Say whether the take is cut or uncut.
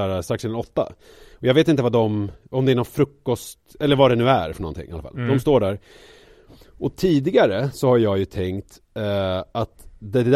uncut